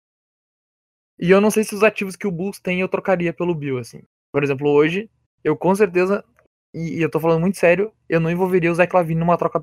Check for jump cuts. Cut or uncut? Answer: uncut